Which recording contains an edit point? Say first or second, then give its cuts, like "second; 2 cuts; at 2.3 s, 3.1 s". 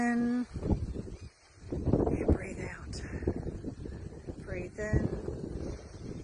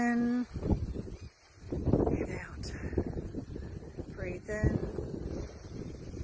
second; 1 cut; at 2.3 s